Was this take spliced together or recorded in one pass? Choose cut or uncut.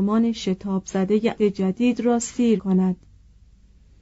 cut